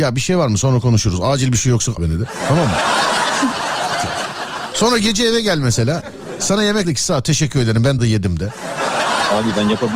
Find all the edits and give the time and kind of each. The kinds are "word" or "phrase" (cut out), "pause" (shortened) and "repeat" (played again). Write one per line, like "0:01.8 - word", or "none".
0:02.0 - word
0:06.8 - word
0:08.0 - word